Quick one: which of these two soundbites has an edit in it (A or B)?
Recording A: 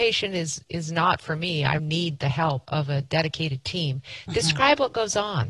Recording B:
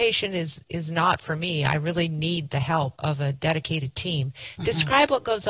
A